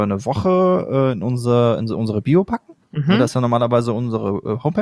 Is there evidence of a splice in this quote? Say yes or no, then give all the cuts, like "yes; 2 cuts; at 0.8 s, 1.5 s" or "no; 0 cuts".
no; 0 cuts